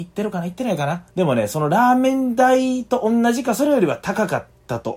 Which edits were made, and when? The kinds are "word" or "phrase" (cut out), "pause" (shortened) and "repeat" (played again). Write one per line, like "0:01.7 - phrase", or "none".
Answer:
0:01.1 - pause